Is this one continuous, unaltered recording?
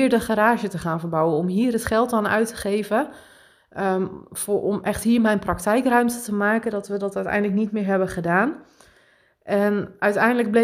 yes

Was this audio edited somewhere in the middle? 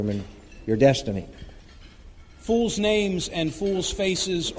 no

